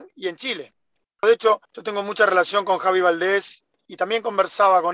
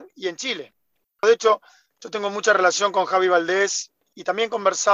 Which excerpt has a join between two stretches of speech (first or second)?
first